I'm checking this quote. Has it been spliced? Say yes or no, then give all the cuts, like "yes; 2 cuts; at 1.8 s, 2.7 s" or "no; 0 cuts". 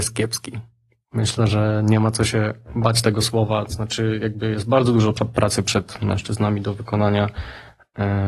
no; 0 cuts